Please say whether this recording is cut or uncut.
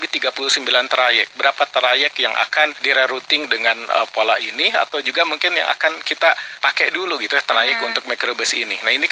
uncut